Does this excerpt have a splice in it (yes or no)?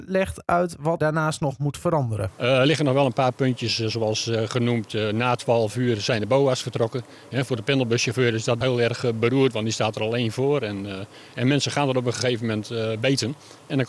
yes